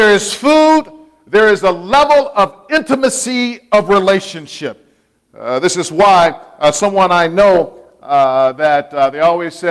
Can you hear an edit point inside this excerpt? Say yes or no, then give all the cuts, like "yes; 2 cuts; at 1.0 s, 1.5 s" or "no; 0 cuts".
no; 0 cuts